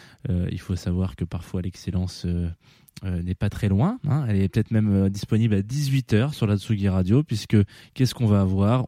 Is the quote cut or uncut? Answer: uncut